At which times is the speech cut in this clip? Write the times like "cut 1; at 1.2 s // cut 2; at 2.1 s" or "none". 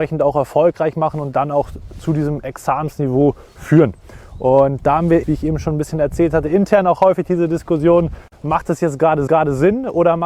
cut 1; at 5.2 s // cut 2; at 9.3 s